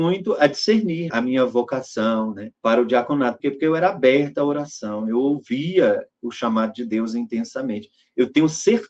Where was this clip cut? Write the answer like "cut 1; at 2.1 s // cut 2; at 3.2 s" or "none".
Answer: cut 1; at 1.1 s // cut 2; at 2.6 s // cut 3; at 3.4 s